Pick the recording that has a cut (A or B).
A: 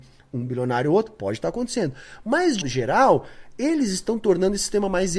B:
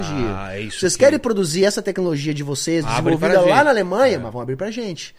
A